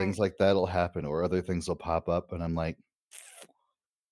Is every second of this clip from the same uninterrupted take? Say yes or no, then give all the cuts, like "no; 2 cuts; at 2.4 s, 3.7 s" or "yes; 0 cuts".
yes; 0 cuts